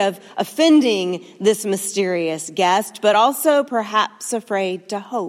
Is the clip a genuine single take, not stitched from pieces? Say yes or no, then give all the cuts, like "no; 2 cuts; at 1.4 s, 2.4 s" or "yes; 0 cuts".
yes; 0 cuts